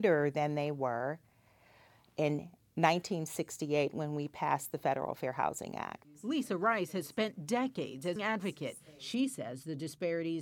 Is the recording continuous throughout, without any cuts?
no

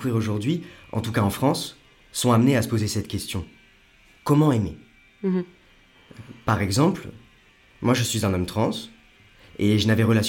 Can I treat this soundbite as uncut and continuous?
yes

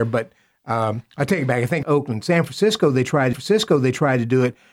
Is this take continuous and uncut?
no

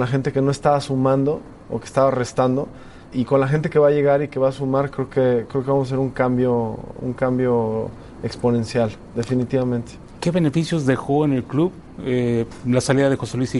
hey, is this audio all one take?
no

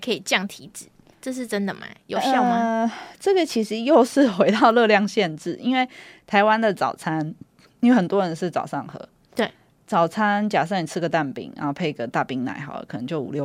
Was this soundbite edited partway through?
no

